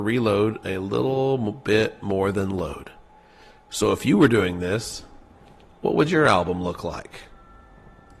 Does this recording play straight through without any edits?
yes; 0 cuts

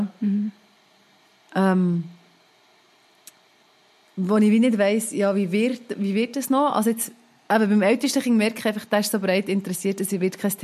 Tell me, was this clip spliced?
no; 0 cuts

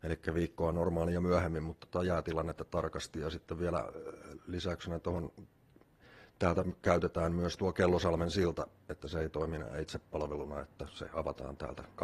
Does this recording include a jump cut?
yes; 1 cut; at 1.8 s

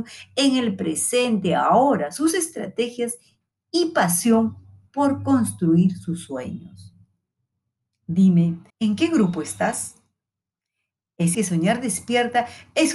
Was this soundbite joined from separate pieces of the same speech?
yes; 2 cuts; at 8.7 s, 11.3 s

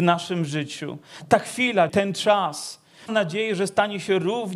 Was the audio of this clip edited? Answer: yes; 2 cuts; at 1.9 s, 3.1 s

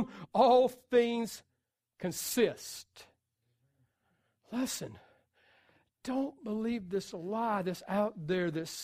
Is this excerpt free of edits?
yes; 0 cuts

